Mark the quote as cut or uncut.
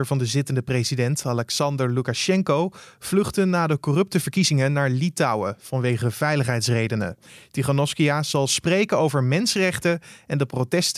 uncut